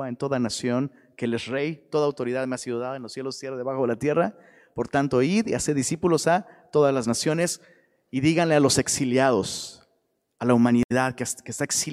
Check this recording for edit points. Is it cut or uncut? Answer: uncut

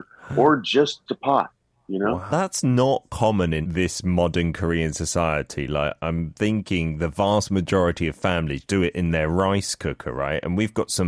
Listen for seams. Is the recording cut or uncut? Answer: cut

